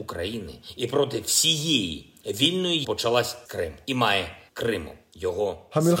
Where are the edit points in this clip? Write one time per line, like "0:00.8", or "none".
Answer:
0:02.8
0:03.5
0:04.5